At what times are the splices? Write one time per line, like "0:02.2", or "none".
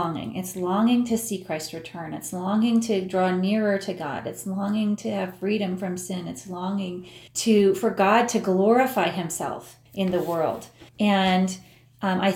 0:07.3
0:09.9
0:10.9